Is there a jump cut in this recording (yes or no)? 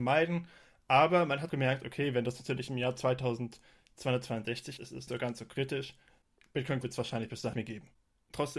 yes